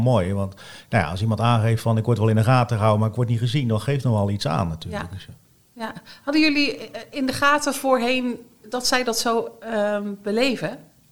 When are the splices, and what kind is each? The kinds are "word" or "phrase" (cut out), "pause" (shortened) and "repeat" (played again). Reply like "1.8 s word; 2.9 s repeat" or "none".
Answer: 5.5 s pause

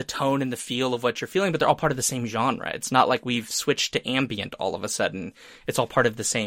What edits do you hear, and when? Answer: none

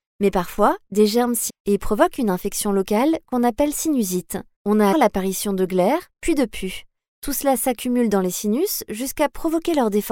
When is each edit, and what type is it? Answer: 1.5 s word; 4.5 s pause; 4.9 s word

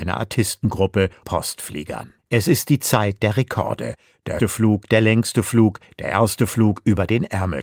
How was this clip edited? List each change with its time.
1.2 s phrase; 2.2 s pause; 4.4 s word

